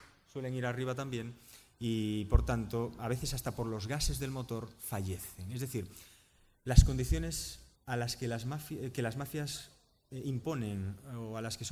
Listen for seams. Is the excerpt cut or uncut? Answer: cut